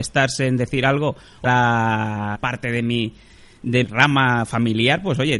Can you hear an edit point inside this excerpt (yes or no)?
yes